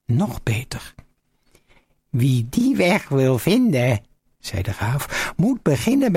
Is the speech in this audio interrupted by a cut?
no; 0 cuts

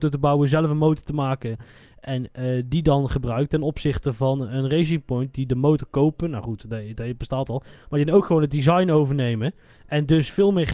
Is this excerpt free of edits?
yes; 0 cuts

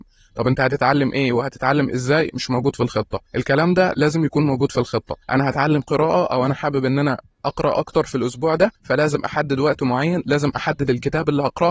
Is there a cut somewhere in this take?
yes; 3 cuts; at 3.3 s, 5.2 s, 8.7 s

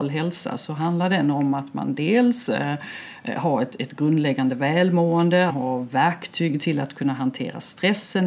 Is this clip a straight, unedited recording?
no; 1 cut; at 5.5 s

